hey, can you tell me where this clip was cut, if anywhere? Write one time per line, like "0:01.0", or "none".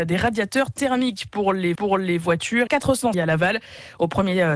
0:01.8
0:02.7
0:03.1

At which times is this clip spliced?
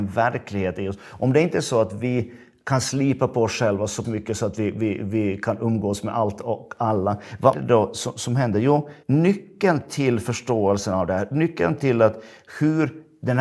0:04.0
0:07.5
0:09.0

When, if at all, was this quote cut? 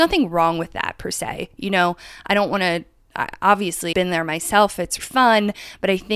0:03.9
0:05.0

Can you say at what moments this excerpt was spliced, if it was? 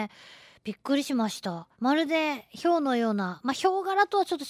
0:01.7

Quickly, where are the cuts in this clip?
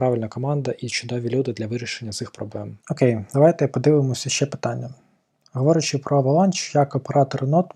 0:02.8

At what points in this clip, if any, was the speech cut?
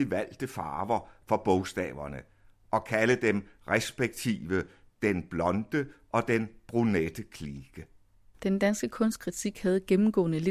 none

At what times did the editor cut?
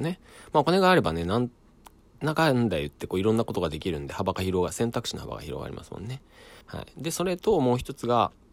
0:06.6

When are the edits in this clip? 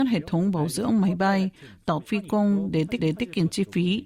0:02.0
0:03.0

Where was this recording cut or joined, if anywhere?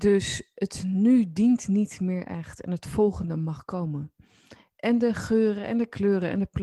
none

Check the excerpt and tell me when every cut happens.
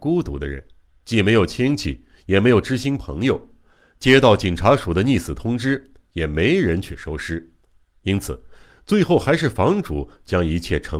none

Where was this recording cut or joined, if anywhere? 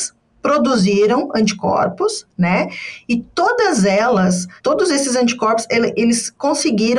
0:04.6

